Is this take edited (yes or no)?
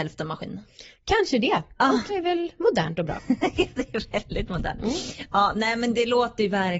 yes